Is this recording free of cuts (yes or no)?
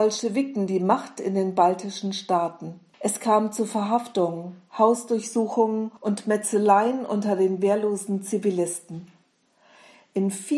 no